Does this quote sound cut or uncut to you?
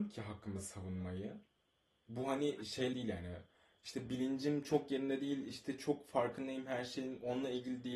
cut